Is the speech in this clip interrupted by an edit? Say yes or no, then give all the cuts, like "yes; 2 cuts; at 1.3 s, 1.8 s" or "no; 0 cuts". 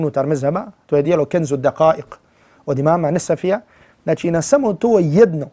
no; 0 cuts